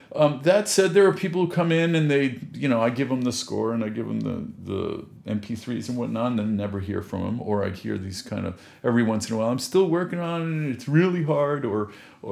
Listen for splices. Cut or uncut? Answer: uncut